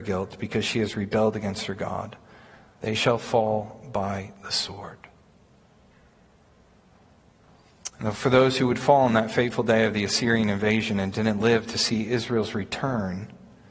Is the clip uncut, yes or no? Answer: yes